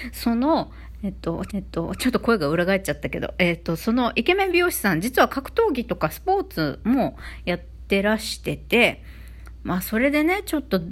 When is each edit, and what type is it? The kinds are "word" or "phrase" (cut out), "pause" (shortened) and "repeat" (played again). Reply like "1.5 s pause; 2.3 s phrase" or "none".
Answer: 1.5 s repeat